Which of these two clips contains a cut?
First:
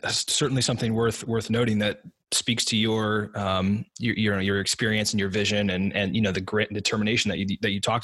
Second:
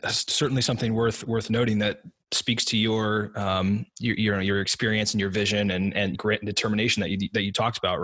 second; 1 cut; at 6.1 s

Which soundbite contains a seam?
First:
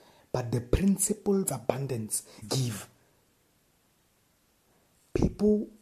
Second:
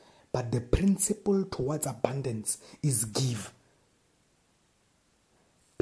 first; 2 cuts; at 1.4 s, 2.4 s

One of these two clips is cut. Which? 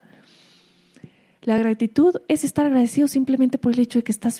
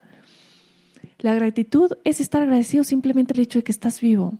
second; 2 cuts; at 1.1 s, 3.3 s

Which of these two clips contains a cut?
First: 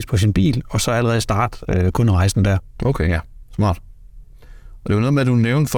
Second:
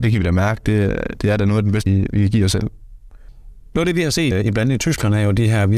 second; 2 cuts; at 1.9 s, 4.3 s

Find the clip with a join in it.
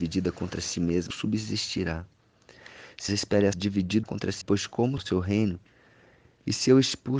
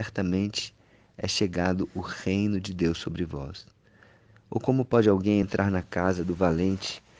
first; 6 cuts; at 1.1 s, 3.1 s, 3.5 s, 4.0 s, 4.4 s, 5.0 s

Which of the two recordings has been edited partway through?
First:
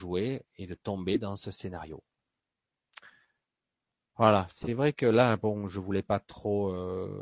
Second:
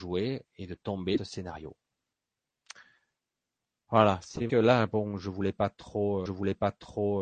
second; 3 cuts; at 1.2 s, 4.5 s, 6.3 s

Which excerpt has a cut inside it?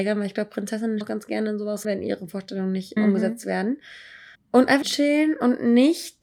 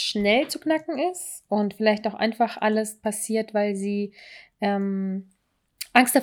first; 5 cuts; at 1.0 s, 1.8 s, 3.0 s, 4.3 s, 4.8 s

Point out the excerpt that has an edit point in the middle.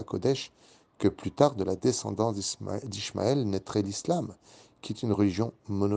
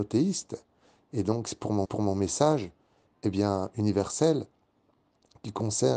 second; 1 cut; at 1.9 s

